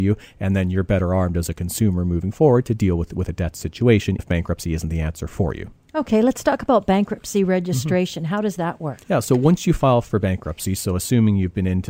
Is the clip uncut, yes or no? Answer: no